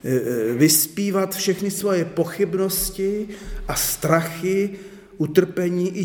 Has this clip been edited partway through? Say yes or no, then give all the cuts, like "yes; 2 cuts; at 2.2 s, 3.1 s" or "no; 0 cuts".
no; 0 cuts